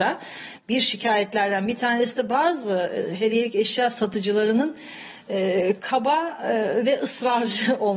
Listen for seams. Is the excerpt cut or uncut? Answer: uncut